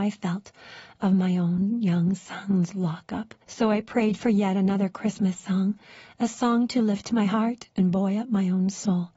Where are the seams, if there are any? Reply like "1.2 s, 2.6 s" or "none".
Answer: 3.4 s